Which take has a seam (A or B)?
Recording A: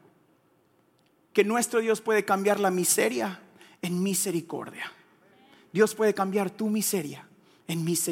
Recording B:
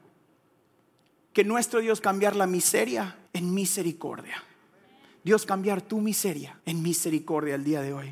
B